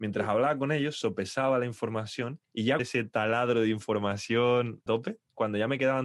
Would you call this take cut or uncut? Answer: cut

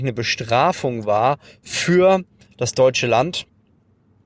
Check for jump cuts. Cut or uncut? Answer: uncut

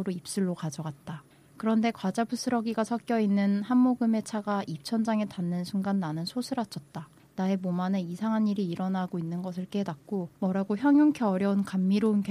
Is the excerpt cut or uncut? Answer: cut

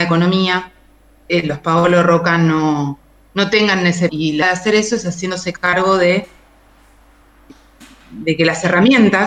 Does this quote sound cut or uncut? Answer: cut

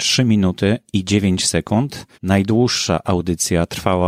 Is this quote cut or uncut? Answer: cut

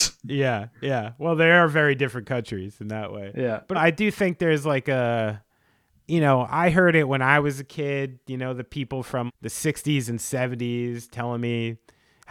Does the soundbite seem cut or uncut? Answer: cut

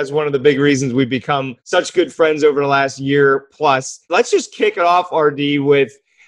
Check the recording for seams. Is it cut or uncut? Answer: cut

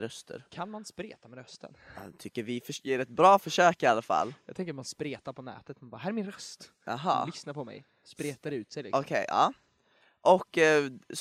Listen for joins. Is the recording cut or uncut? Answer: uncut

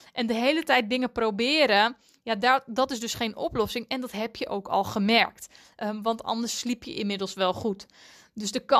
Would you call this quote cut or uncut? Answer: uncut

